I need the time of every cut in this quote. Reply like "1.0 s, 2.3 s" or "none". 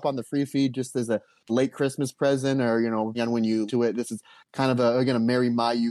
1.5 s, 3.1 s, 3.7 s